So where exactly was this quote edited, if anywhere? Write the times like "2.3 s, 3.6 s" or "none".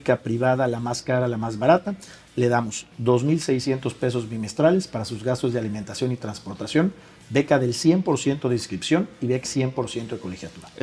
9.4 s